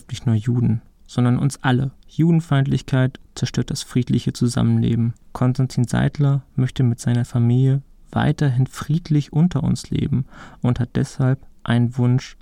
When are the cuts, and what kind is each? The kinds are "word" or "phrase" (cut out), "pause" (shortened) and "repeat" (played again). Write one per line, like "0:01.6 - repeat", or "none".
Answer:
0:02.0 - pause
0:05.2 - pause